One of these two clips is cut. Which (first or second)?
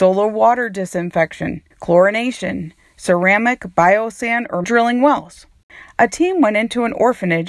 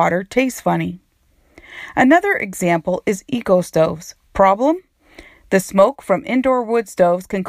first